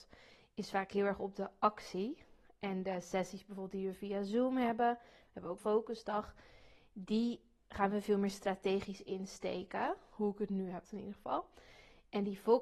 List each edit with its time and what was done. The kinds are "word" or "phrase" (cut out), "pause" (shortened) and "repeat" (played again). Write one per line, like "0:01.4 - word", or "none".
0:05.6 - word
0:10.9 - word